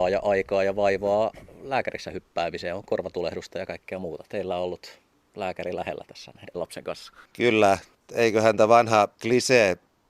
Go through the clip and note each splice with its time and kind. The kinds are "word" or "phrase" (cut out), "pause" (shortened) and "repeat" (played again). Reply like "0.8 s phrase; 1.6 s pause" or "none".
6.5 s word